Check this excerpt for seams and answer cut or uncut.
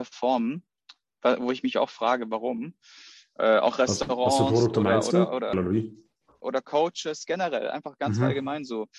cut